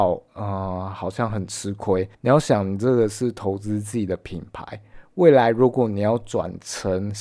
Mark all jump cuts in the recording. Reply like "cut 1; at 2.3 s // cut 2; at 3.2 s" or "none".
cut 1; at 2.1 s